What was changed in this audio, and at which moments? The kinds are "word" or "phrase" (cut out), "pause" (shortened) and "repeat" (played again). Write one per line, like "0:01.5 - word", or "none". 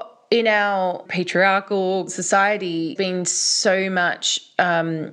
0:01.1 - word
0:02.1 - word
0:03.0 - word